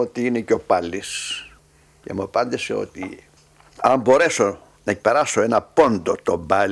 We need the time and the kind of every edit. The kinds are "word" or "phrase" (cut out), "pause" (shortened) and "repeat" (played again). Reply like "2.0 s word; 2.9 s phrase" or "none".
1.6 s pause